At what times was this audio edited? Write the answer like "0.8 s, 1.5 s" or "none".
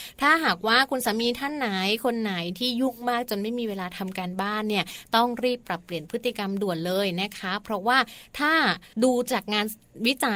8.9 s